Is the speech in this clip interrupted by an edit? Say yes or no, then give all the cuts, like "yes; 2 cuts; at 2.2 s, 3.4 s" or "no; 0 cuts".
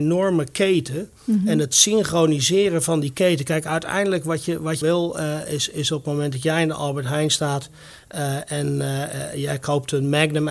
yes; 1 cut; at 4.8 s